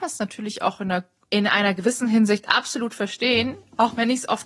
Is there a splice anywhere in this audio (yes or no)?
yes